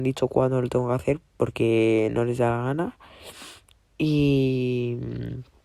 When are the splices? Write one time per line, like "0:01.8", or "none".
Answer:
0:03.7